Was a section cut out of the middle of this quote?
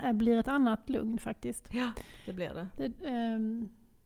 no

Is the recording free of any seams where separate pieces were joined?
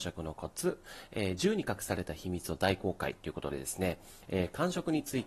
yes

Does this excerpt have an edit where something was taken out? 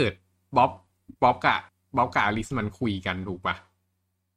yes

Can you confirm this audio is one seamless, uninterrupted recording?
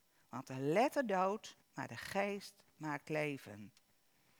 no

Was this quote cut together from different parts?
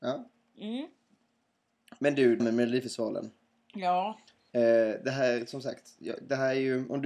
yes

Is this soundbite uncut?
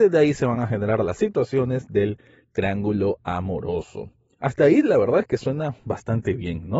yes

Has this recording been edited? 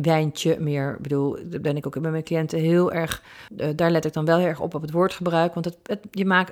yes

